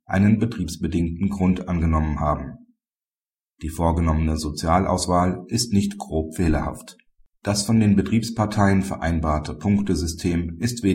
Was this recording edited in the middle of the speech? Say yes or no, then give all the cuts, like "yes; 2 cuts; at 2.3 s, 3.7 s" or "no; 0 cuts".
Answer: no; 0 cuts